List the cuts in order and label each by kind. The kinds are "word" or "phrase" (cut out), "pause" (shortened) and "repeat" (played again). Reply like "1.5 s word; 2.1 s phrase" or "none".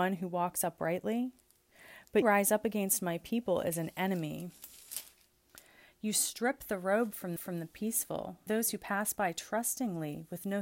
2.2 s word; 7.4 s repeat; 8.5 s word